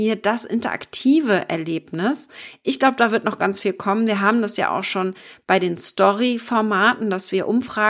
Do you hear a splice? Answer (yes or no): no